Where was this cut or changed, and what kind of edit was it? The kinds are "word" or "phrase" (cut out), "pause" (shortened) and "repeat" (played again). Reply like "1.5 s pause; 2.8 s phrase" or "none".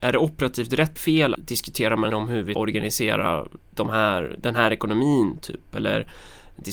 1.0 s word; 1.3 s word; 2.1 s phrase; 2.5 s word; 3.7 s pause